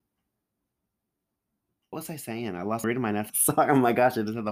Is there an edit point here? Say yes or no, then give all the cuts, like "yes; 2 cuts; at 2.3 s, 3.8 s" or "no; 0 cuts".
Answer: yes; 3 cuts; at 1.9 s, 2.8 s, 3.3 s